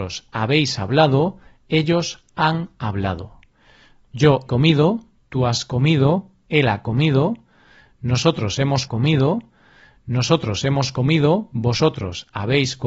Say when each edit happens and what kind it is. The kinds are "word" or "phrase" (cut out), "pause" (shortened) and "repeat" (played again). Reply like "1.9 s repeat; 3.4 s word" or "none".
4.5 s word; 8.9 s repeat